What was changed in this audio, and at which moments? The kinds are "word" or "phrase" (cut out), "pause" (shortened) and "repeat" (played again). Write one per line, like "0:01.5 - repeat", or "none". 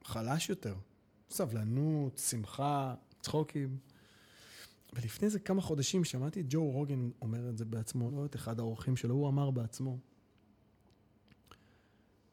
0:06.0 - word
0:08.1 - word